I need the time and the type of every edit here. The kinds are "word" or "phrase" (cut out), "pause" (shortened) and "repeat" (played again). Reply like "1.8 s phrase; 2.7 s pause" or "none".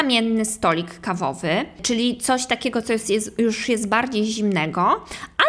none